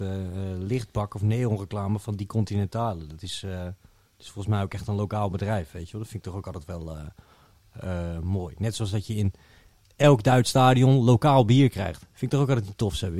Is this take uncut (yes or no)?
yes